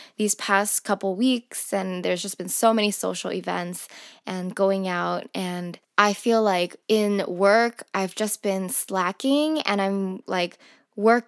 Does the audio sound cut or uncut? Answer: cut